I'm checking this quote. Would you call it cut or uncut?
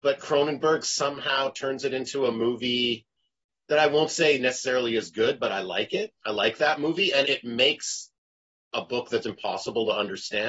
cut